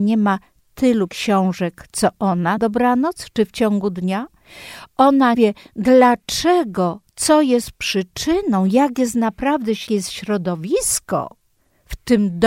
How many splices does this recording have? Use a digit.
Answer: 4